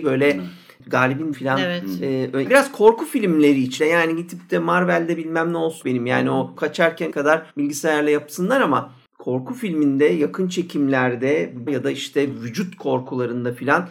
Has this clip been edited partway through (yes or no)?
yes